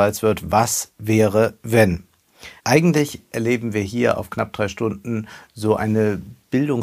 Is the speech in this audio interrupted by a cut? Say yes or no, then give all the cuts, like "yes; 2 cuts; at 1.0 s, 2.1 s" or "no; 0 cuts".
yes; 1 cut; at 2.6 s